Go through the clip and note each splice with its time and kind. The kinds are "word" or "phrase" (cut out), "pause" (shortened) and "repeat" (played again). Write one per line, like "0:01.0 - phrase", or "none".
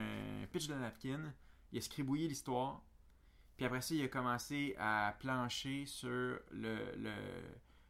none